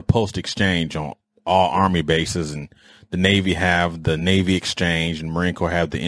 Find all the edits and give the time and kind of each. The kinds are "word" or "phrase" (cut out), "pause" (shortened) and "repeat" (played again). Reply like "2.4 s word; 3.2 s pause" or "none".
none